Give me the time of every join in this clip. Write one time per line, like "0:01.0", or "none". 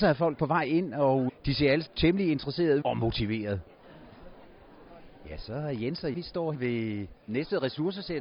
0:01.3
0:01.9
0:02.8
0:06.1
0:06.5
0:07.3